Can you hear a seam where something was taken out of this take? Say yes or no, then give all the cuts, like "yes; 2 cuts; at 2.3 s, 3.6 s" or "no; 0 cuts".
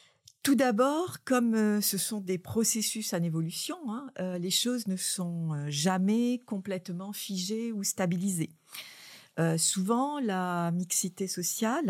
no; 0 cuts